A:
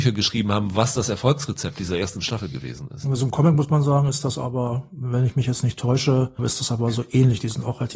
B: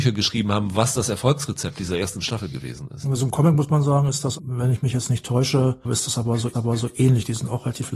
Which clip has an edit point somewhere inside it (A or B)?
B